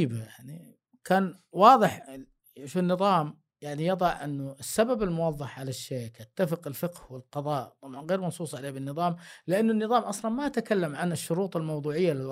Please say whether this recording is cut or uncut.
cut